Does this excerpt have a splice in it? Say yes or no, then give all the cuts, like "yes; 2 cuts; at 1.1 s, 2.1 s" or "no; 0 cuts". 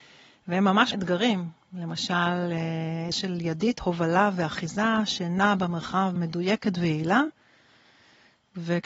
yes; 3 cuts; at 0.9 s, 3.1 s, 6.2 s